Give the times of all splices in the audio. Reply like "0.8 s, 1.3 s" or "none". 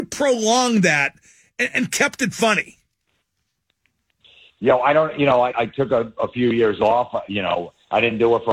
none